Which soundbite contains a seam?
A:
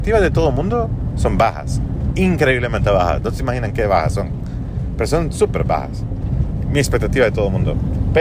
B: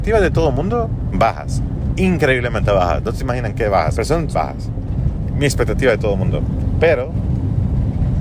B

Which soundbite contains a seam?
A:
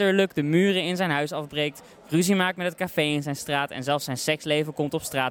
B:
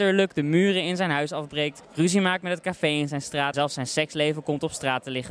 B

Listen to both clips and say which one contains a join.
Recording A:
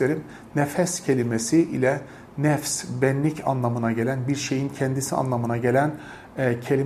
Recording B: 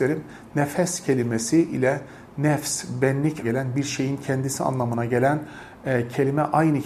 B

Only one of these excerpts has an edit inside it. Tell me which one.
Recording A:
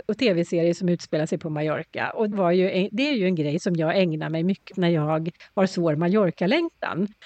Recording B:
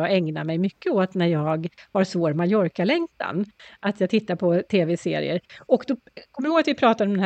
A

